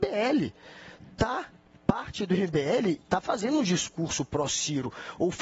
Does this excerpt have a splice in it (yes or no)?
no